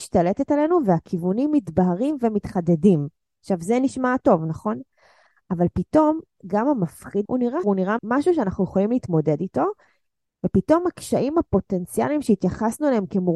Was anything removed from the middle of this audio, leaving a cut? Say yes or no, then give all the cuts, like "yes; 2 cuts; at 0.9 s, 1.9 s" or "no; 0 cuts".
yes; 3 cuts; at 7.3 s, 7.6 s, 8.0 s